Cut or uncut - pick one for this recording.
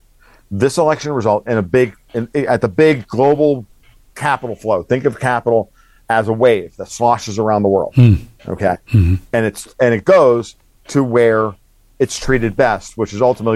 uncut